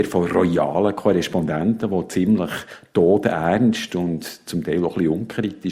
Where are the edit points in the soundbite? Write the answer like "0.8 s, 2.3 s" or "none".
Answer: none